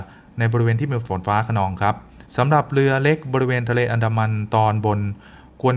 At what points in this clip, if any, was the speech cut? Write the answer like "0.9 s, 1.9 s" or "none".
2.3 s

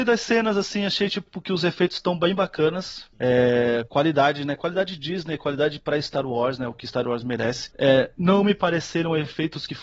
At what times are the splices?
none

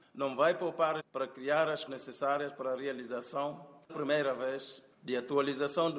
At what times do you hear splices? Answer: 1.0 s, 1.9 s, 3.9 s

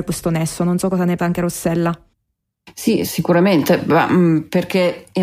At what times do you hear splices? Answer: 1.2 s

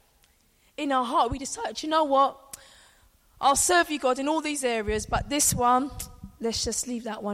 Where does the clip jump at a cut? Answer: none

